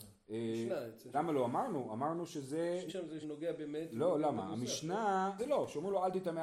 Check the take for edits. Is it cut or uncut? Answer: cut